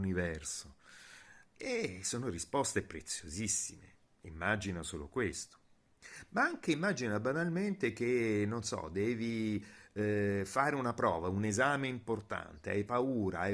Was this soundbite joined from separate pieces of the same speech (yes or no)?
no